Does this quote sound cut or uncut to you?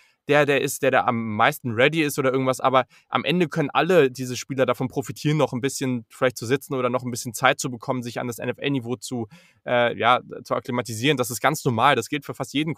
uncut